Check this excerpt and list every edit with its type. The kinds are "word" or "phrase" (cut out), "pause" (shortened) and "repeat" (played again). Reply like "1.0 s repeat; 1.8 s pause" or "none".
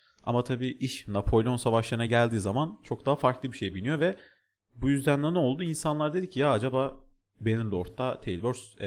none